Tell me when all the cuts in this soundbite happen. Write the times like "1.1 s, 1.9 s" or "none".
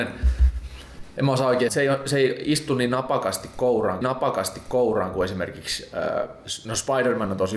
1.7 s, 4.0 s

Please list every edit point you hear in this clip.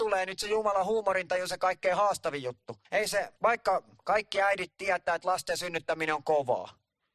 2.8 s, 3.4 s

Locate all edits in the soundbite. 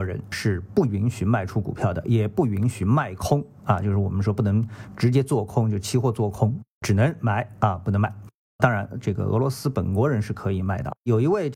none

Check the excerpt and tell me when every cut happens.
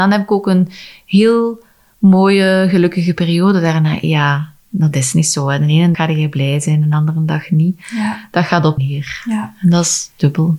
5.9 s, 8.8 s

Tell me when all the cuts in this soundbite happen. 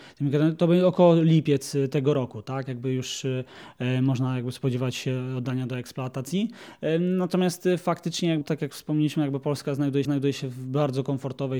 8.4 s, 10.0 s

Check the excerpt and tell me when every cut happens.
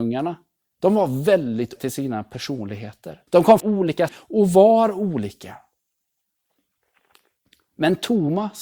1.8 s, 3.3 s, 3.6 s, 4.1 s

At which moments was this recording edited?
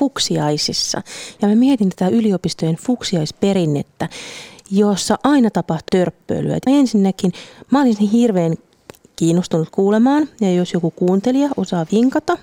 5.9 s, 6.7 s

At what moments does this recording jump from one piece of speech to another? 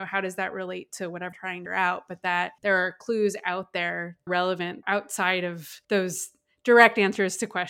1.3 s, 1.7 s, 2.6 s, 4.3 s, 4.8 s, 5.8 s

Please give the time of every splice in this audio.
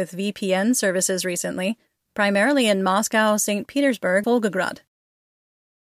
4.2 s

